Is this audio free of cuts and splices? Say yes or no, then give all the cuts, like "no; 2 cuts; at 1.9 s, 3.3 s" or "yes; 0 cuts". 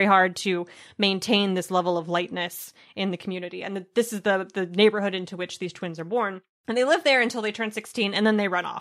yes; 0 cuts